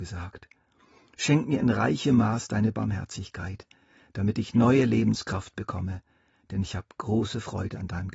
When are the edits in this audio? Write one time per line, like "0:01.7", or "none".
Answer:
none